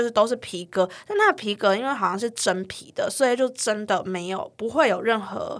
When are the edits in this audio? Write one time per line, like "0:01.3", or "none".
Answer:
none